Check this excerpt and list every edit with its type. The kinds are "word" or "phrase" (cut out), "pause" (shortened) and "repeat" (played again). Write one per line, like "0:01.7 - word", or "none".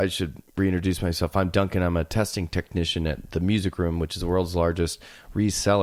none